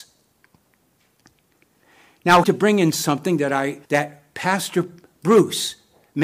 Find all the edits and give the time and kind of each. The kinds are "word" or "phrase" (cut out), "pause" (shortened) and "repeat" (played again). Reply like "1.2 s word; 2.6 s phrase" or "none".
2.4 s phrase; 3.9 s pause